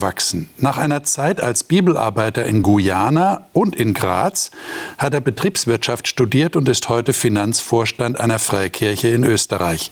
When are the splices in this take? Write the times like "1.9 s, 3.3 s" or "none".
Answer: none